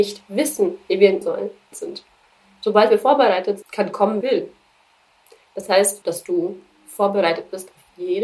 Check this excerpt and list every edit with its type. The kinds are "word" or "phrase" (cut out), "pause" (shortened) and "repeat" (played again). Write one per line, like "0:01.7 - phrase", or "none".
0:01.2 - word
0:01.7 - phrase
0:03.6 - word
0:04.2 - word
0:06.0 - phrase

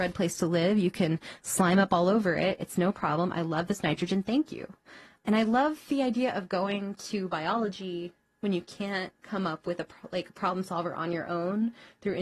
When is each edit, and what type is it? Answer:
none

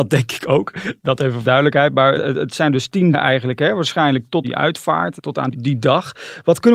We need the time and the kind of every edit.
0:01.4 - phrase
0:02.1 - word
0:03.1 - word
0:04.4 - word
0:05.5 - word

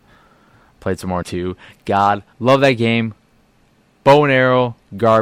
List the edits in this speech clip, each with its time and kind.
0:01.2 - word
0:02.3 - pause

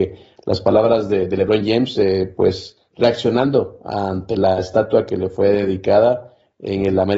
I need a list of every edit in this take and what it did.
0:02.8 - pause

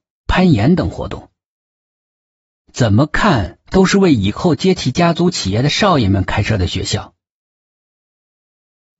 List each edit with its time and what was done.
none

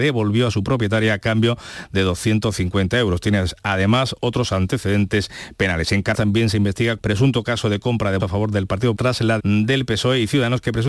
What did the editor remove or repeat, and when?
0:06.1 - word
0:07.0 - word
0:08.2 - word
0:08.9 - word
0:09.4 - word

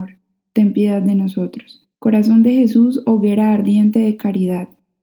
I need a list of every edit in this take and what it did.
0:01.9 - pause

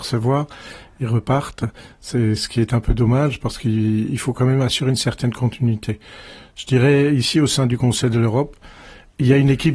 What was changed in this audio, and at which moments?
none

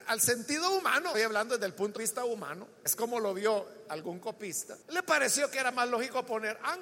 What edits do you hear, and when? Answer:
0:01.1 - phrase
0:02.0 - word
0:02.9 - word
0:04.8 - pause

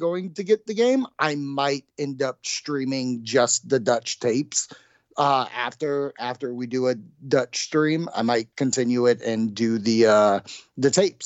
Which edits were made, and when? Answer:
0:08.5 - pause

